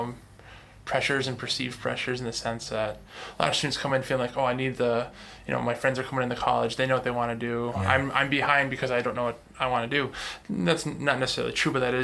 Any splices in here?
no; 0 cuts

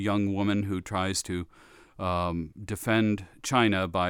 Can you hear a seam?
no; 0 cuts

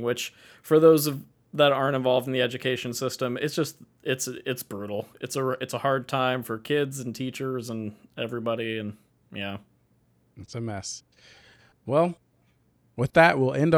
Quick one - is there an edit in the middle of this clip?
no; 0 cuts

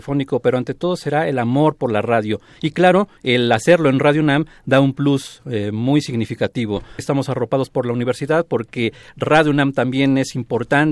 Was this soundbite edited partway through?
yes; 2 cuts; at 3.2 s, 7.0 s

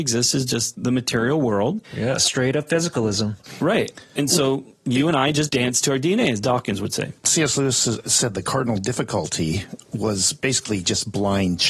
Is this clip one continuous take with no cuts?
no; 2 cuts; at 1.8 s, 7.2 s

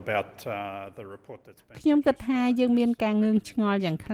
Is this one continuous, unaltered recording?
yes; 0 cuts

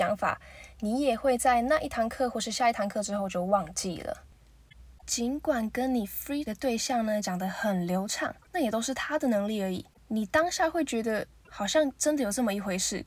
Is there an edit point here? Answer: yes; 2 cuts; at 6.5 s, 11.5 s

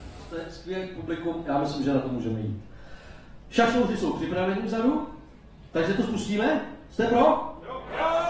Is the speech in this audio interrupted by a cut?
no; 0 cuts

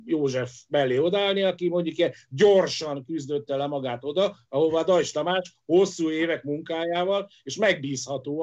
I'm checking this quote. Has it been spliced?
no; 0 cuts

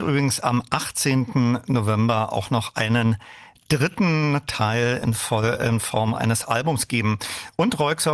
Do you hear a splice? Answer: no; 0 cuts

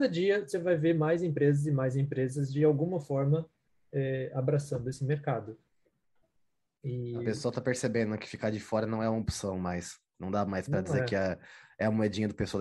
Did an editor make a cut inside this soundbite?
no; 0 cuts

